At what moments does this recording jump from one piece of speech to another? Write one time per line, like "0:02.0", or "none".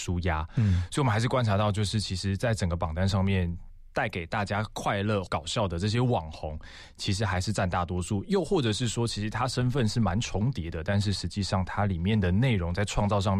0:05.3